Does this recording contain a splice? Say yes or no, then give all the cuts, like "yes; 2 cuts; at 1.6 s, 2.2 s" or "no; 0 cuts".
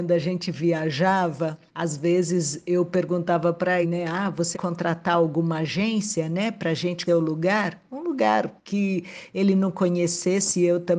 yes; 5 cuts; at 1.7 s, 3.8 s, 4.5 s, 7.1 s, 8.6 s